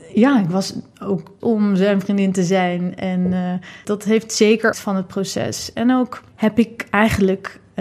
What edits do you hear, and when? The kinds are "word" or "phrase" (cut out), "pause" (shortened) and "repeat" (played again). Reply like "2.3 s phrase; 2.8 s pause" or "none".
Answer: 1.4 s word; 3.8 s word; 4.7 s phrase